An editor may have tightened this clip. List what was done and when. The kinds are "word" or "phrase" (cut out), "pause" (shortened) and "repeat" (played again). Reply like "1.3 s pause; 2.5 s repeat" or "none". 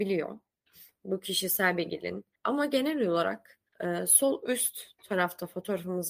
2.3 s pause; 3.7 s pause